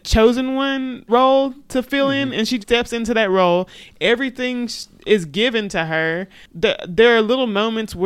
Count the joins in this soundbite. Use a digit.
2